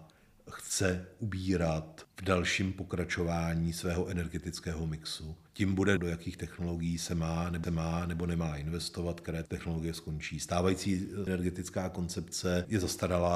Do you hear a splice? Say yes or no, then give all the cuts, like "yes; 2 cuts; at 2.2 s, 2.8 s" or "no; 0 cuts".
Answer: yes; 4 cuts; at 5.5 s, 6.0 s, 7.6 s, 11.3 s